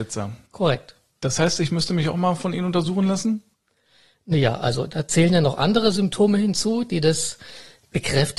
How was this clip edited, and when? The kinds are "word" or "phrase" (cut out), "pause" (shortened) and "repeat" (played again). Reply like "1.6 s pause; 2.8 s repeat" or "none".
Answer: none